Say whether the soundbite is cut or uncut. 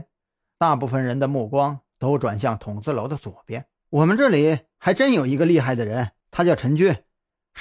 cut